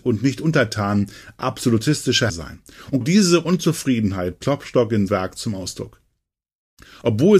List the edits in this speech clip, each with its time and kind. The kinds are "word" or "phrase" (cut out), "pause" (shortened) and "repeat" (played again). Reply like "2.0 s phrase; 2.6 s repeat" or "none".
2.3 s word; 3.0 s word; 4.4 s word; 5.1 s word